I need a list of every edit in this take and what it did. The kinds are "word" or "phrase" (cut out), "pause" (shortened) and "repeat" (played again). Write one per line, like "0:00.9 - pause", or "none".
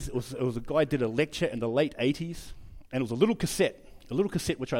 none